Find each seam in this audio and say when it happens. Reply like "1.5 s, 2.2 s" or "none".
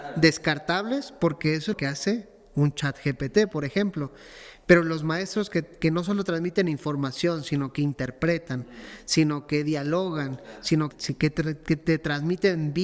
1.7 s, 10.9 s

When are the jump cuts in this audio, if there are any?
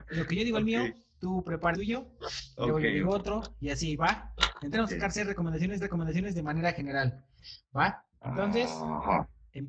1.7 s, 4.7 s, 5.8 s

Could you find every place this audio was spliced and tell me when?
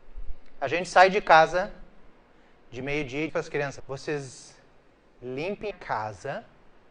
3.3 s, 3.8 s, 5.7 s

